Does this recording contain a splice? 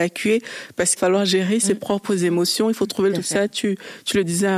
yes; 2 cuts; at 1.0 s, 3.1 s

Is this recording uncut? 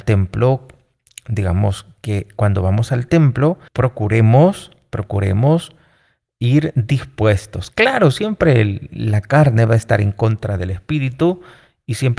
no; 1 cut; at 3.7 s

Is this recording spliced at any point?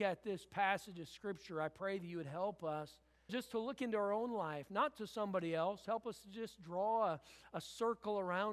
yes; 1 cut; at 3.3 s

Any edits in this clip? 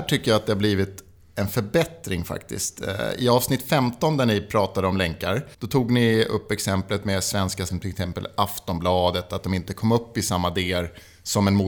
yes; 2 cuts; at 5.5 s, 7.7 s

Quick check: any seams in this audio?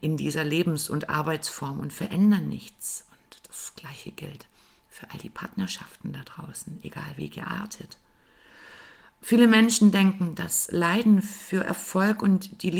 no; 0 cuts

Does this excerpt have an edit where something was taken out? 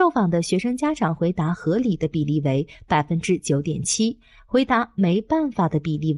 no; 0 cuts

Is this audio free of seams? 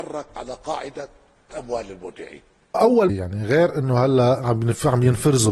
no; 3 cuts; at 1.5 s, 2.7 s, 3.1 s

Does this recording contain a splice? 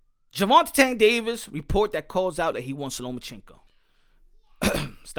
yes; 2 cuts; at 2.5 s, 3.7 s

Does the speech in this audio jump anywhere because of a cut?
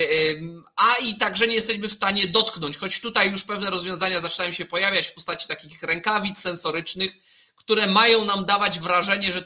no; 0 cuts

